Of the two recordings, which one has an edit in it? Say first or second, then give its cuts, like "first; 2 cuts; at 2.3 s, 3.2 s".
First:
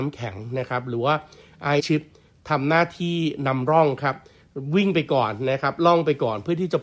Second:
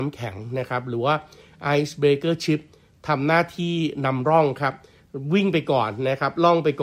first; 1 cut; at 1.8 s